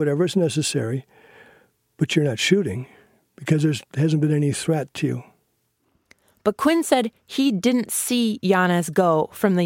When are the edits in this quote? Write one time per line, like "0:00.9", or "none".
none